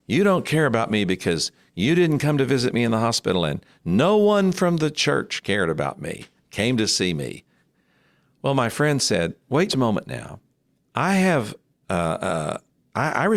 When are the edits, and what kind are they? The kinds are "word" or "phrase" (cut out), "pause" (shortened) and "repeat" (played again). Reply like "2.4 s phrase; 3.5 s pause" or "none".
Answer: 9.7 s word; 10.7 s pause